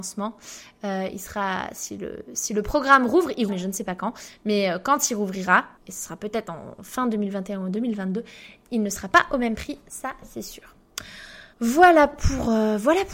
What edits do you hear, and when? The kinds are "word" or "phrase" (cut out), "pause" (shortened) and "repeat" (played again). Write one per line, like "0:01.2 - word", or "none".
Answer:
0:03.5 - word
0:05.8 - pause
0:11.5 - pause